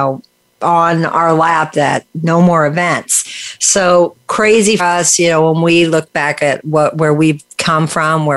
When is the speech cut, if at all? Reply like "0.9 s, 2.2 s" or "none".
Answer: 4.8 s